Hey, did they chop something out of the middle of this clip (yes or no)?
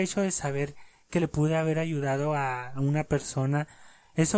no